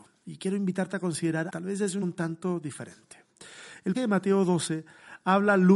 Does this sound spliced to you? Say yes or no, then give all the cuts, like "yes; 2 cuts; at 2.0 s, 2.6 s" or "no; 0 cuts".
yes; 3 cuts; at 1.5 s, 2.0 s, 3.9 s